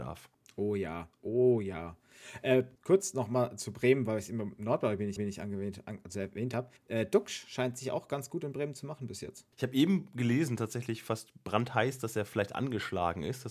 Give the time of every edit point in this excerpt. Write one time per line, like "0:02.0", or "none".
0:01.1
0:02.8
0:05.2
0:06.8
0:09.5